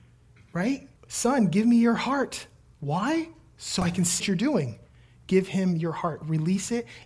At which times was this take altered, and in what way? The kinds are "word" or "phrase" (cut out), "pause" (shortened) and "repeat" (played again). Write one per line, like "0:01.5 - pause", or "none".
0:01.0 - pause
0:04.2 - word